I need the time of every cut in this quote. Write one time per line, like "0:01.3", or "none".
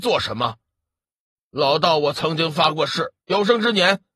0:03.2